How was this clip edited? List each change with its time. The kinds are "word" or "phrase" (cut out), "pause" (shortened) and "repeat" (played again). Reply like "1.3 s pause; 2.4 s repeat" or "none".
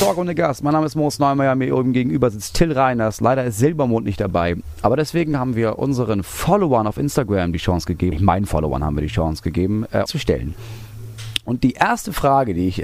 8.1 s phrase; 10.1 s phrase